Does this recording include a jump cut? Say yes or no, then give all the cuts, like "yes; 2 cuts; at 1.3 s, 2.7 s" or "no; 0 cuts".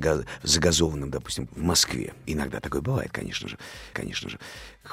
yes; 3 cuts; at 1.5 s, 2.2 s, 3.9 s